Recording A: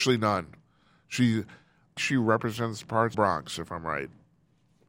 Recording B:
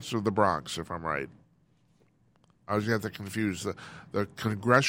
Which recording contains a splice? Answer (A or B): A